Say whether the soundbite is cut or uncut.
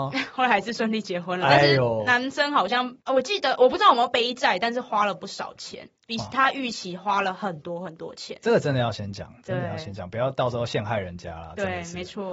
cut